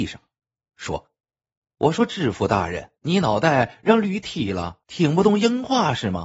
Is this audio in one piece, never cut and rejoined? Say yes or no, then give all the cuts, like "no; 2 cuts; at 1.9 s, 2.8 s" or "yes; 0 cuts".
no; 3 cuts; at 1.5 s, 3.0 s, 4.8 s